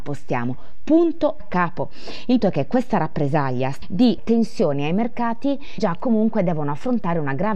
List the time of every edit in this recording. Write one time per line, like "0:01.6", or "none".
0:01.4
0:02.4
0:03.8
0:04.2
0:05.8